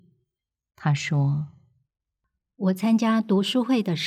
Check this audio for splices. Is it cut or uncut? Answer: uncut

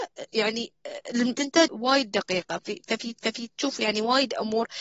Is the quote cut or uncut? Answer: cut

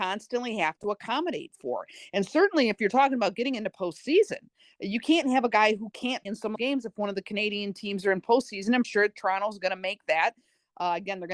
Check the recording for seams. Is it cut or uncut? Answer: cut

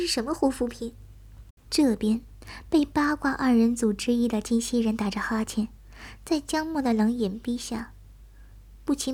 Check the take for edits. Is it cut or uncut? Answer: cut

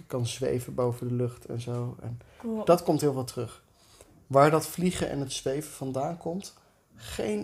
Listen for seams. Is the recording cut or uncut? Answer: uncut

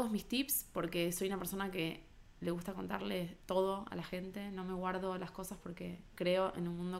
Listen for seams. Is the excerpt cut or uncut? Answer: uncut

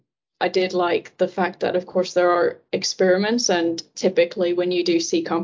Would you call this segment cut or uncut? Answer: uncut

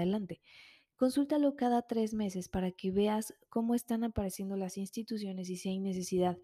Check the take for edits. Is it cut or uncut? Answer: uncut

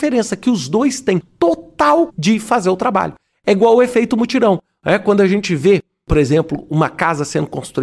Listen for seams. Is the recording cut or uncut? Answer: cut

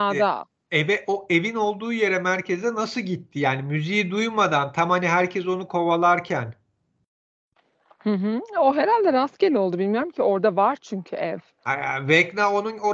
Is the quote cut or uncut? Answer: uncut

